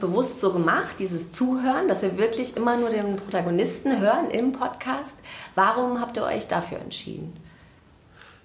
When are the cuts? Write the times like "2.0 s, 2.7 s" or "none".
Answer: none